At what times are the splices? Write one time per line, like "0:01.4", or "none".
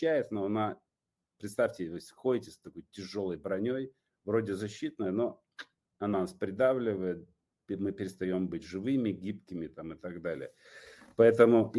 none

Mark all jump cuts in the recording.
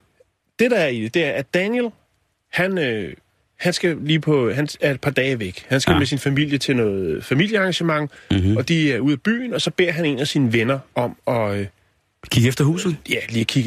none

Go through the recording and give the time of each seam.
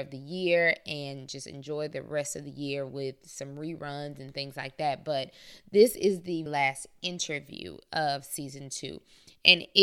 0:06.5

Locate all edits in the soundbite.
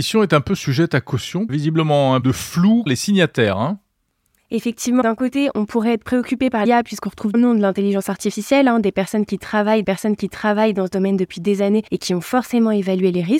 0:01.5
0:02.2
0:02.9
0:05.0
0:05.5
0:06.6
0:07.3
0:09.8
0:11.9

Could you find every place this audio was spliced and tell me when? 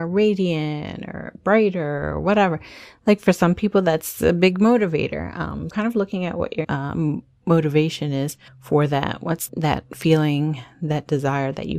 0:05.7
0:06.6
0:08.5
0:09.5

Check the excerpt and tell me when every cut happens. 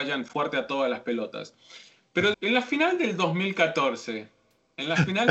0:02.3

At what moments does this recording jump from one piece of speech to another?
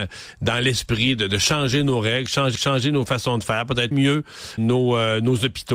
0:02.5
0:03.9
0:04.6

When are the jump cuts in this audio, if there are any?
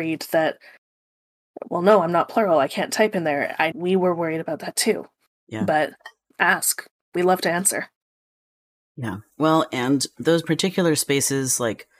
0:03.7
0:06.3
0:09.3

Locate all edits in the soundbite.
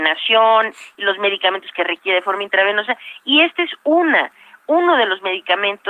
none

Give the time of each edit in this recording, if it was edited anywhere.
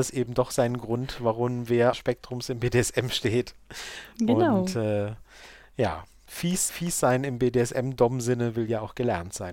0:01.9
0:06.7

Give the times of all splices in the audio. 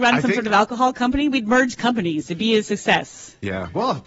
none

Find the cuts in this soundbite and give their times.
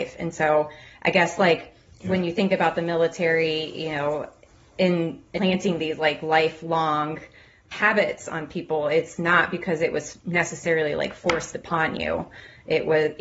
none

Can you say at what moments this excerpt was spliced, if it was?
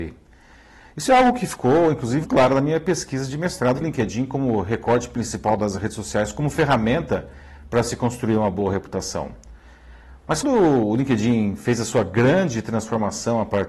0:02.2
0:03.8
0:10.4

